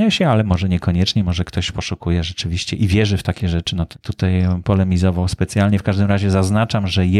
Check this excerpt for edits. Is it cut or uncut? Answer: cut